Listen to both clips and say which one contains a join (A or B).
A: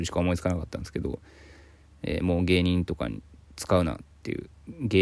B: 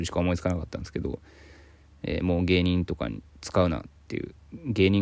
B